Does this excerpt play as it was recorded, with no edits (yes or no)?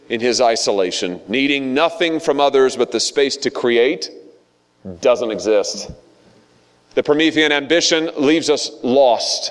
yes